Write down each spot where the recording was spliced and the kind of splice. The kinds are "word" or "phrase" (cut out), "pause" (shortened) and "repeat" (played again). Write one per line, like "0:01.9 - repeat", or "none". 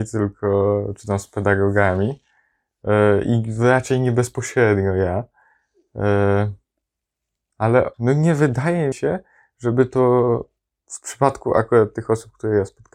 0:07.9 - pause
0:08.9 - word
0:10.6 - pause